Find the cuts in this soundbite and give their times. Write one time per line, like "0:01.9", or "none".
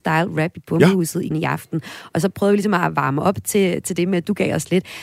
0:01.3